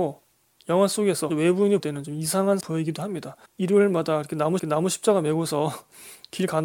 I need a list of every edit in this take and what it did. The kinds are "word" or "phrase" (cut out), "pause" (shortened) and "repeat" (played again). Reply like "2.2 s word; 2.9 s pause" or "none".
1.3 s word; 1.8 s word; 2.6 s word; 3.5 s pause; 4.6 s repeat